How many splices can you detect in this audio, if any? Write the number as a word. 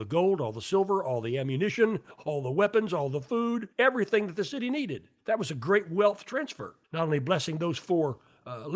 three